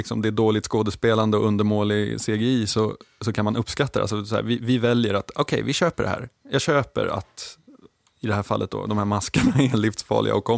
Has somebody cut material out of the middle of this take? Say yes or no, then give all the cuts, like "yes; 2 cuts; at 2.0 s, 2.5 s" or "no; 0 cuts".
no; 0 cuts